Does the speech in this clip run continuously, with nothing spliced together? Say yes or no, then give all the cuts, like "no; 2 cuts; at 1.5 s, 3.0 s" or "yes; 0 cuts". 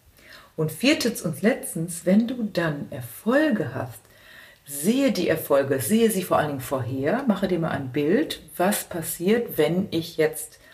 yes; 0 cuts